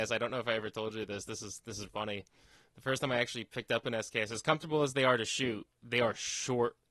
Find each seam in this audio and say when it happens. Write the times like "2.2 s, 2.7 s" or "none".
1.9 s